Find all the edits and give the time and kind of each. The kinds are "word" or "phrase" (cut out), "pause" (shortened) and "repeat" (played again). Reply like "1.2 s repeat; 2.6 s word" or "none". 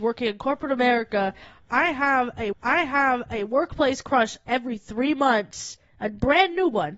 2.5 s repeat